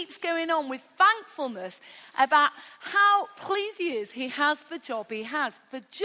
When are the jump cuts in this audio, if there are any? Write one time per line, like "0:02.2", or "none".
none